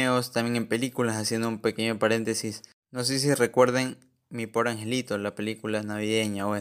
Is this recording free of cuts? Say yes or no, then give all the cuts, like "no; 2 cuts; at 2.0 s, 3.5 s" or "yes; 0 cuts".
yes; 0 cuts